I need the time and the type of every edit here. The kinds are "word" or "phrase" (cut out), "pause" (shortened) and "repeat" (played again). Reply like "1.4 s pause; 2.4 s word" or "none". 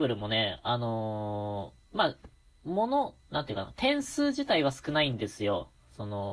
1.8 s pause; 3.2 s pause